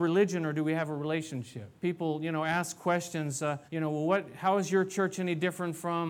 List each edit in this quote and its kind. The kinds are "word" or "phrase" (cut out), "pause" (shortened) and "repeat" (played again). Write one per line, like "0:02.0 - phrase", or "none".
0:01.8 - pause
0:03.7 - pause